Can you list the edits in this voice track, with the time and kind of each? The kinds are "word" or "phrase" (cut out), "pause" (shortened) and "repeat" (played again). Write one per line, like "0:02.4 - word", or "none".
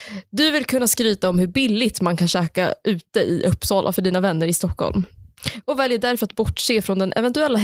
none